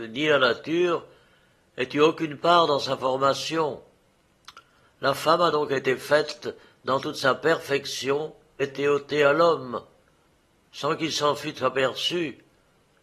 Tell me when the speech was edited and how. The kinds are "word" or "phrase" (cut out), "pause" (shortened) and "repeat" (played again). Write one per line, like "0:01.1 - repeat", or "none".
0:08.6 - phrase